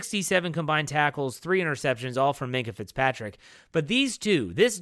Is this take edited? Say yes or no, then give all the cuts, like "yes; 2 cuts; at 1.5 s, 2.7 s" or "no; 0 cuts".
no; 0 cuts